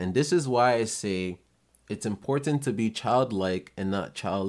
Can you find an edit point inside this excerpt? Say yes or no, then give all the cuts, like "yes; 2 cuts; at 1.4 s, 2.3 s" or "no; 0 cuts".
no; 0 cuts